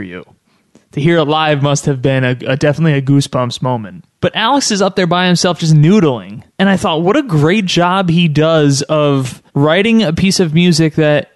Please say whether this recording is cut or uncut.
cut